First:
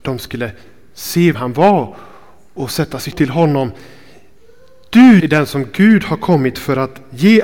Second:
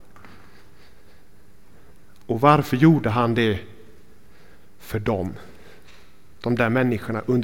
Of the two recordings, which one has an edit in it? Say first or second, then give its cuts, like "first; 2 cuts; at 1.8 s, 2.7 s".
first; 3 cuts; at 1.3 s, 3.1 s, 5.2 s